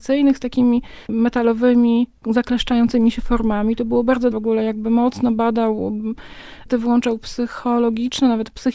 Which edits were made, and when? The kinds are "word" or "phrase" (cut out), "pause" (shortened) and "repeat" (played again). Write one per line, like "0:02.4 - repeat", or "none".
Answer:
0:01.0 - pause
0:04.3 - word
0:06.7 - word